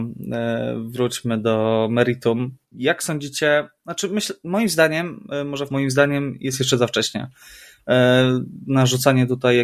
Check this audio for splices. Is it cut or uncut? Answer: cut